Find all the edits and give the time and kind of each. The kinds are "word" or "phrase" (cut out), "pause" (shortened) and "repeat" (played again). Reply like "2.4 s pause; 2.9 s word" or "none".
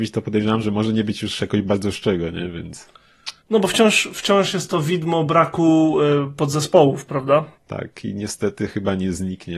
3.4 s pause; 7.5 s pause